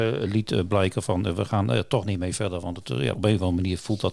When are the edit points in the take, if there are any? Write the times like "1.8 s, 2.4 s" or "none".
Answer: 3.1 s